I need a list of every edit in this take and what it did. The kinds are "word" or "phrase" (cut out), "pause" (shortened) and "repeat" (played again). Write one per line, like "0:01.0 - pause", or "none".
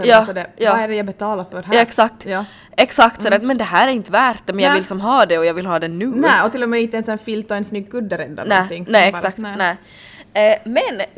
none